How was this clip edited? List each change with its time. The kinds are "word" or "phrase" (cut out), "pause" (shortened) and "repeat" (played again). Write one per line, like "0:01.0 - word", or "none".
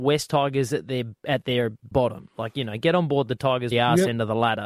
0:01.9 - word
0:03.7 - phrase